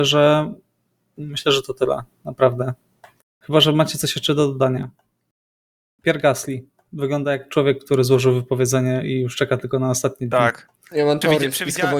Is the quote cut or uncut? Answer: cut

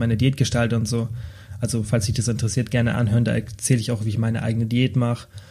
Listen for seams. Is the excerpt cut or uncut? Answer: uncut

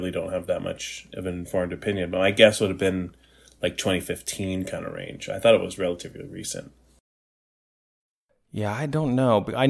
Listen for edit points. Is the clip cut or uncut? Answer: uncut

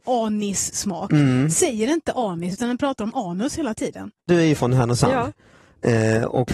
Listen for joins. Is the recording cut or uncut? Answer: uncut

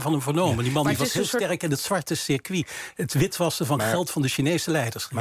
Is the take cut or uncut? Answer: uncut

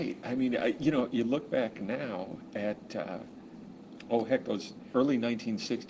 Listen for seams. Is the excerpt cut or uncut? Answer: uncut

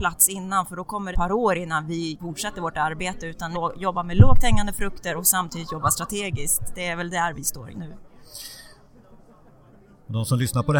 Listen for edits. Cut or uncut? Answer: cut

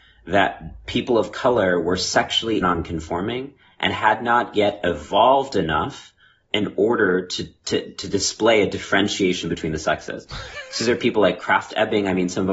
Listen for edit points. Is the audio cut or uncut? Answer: cut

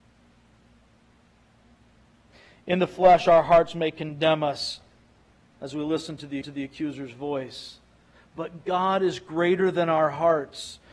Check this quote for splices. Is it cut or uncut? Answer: cut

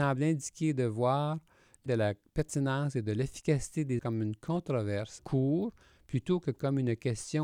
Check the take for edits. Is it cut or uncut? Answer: cut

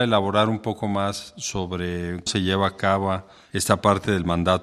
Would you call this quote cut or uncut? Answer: cut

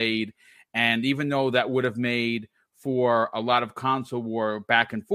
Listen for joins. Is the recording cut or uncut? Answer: uncut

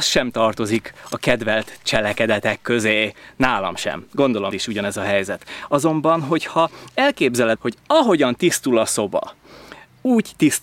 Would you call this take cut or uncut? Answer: cut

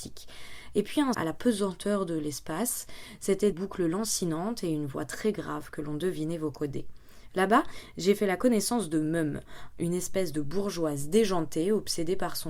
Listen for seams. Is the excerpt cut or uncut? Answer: cut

